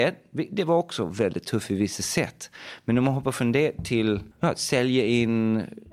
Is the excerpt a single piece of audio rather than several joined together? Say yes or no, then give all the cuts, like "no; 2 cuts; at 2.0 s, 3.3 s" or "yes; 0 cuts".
no; 1 cut; at 4.3 s